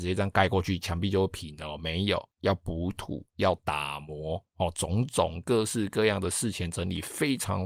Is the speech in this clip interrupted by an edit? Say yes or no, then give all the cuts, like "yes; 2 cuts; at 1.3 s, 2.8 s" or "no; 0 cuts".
yes; 1 cut; at 2.3 s